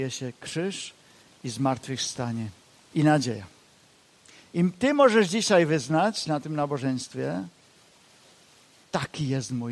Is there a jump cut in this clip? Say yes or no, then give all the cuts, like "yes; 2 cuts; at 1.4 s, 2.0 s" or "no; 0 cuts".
no; 0 cuts